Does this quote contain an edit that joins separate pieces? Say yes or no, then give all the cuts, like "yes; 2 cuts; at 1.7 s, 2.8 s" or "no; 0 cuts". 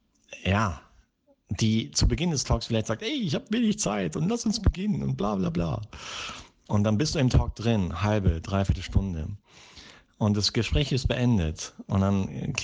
no; 0 cuts